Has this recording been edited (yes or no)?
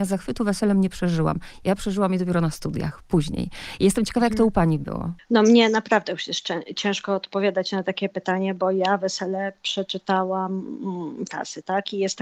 yes